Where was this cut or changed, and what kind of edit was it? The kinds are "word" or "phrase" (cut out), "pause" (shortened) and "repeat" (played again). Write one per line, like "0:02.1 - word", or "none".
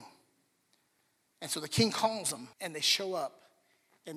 0:02.5 - pause